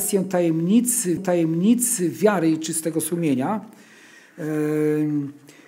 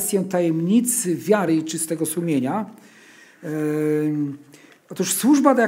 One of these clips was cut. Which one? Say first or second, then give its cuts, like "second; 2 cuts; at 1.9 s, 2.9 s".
first; 1 cut; at 1.2 s